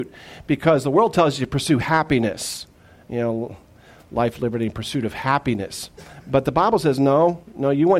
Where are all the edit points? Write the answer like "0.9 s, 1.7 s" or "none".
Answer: none